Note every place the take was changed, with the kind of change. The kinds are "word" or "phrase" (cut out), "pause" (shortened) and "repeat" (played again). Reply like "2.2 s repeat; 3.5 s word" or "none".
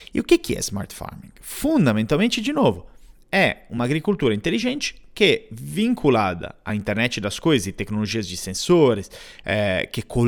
none